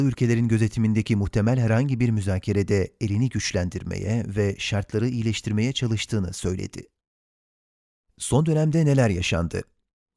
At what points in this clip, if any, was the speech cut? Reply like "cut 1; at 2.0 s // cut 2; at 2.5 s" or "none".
none